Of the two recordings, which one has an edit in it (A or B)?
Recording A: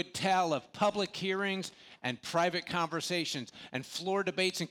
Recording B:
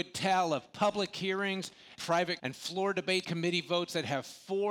B